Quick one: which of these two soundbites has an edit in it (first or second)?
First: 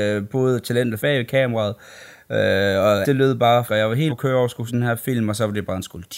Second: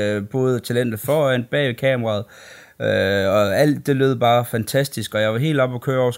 first